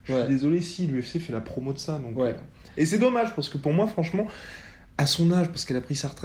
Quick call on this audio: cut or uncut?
uncut